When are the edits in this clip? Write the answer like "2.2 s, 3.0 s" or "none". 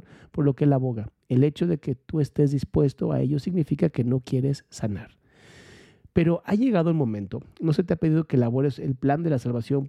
none